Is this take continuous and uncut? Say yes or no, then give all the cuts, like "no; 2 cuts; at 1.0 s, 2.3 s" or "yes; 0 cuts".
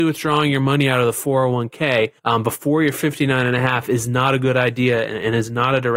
no; 1 cut; at 2.2 s